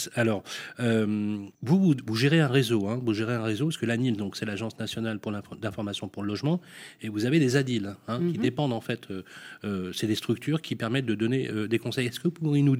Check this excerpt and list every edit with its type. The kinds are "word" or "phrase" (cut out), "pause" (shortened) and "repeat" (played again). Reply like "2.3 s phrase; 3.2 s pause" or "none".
1.5 s pause